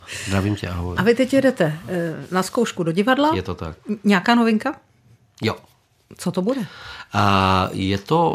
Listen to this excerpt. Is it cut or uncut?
uncut